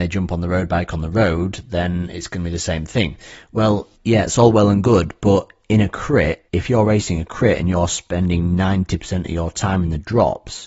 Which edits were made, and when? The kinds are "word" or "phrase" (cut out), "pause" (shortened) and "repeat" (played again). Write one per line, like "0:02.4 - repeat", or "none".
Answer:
0:04.0 - pause
0:06.5 - pause